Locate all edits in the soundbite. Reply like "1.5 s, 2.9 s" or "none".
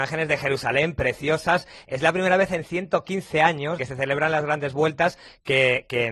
3.8 s